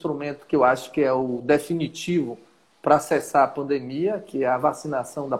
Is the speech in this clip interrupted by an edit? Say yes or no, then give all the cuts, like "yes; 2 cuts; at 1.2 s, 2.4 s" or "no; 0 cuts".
no; 0 cuts